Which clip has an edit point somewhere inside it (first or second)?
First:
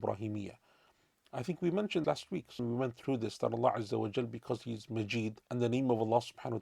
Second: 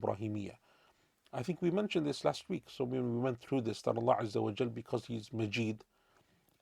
first